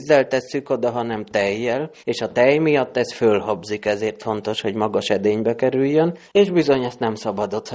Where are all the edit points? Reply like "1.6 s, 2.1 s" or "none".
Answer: 2.0 s, 6.2 s